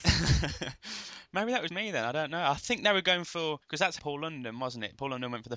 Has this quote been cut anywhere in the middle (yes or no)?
yes